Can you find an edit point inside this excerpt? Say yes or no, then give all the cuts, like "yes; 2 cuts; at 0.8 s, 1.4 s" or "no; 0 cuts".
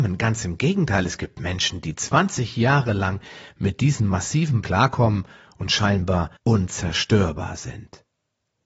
yes; 2 cuts; at 4.6 s, 6.4 s